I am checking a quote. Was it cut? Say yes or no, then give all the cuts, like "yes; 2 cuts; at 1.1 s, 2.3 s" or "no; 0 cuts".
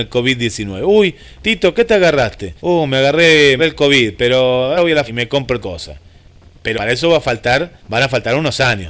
yes; 8 cuts; at 1.4 s, 2.6 s, 3.6 s, 4.8 s, 5.1 s, 5.6 s, 6.8 s, 7.8 s